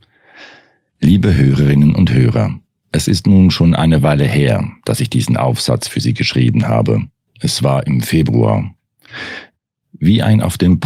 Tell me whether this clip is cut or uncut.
uncut